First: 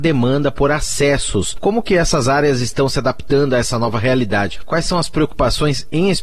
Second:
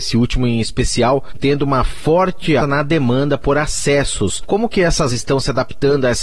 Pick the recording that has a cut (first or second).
second